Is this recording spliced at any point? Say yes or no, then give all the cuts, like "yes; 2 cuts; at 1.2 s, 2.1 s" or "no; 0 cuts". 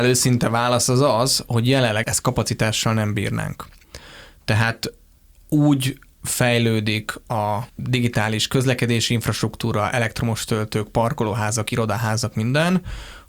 yes; 3 cuts; at 1.5 s, 2.0 s, 7.7 s